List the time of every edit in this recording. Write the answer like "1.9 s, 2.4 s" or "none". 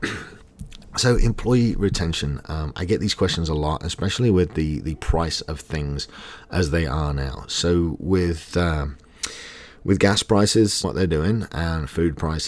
10.8 s